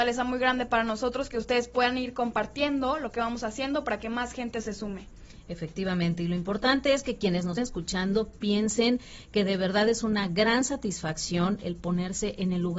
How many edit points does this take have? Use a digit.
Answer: 1